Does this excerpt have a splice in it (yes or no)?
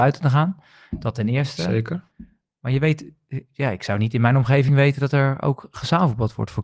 no